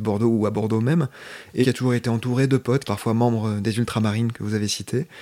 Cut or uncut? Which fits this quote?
cut